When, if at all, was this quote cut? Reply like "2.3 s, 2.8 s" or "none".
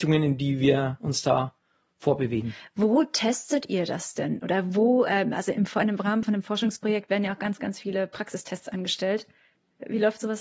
none